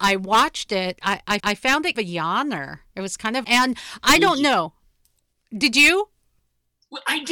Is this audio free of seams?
no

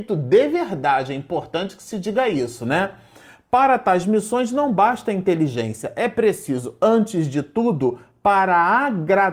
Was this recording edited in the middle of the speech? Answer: no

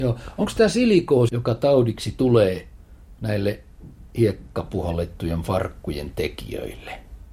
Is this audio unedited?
no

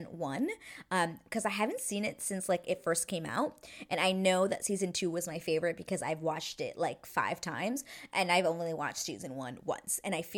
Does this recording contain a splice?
no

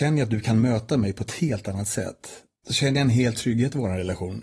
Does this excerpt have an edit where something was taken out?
yes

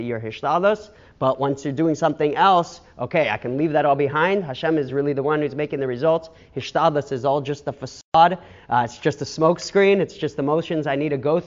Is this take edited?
no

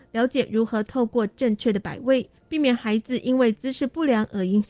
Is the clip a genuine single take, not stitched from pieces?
no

